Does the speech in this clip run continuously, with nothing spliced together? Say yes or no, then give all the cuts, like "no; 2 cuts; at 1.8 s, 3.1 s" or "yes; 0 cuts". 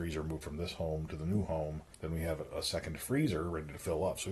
no; 1 cut; at 1.9 s